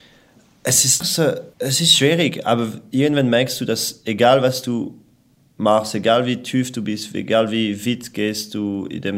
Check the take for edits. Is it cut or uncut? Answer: cut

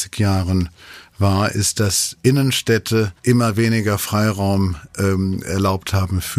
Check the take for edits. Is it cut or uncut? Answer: cut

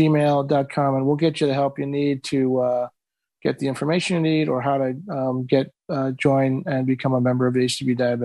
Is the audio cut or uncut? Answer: uncut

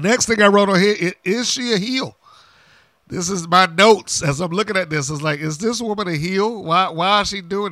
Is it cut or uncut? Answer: uncut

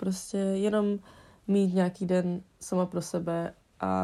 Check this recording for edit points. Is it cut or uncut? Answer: uncut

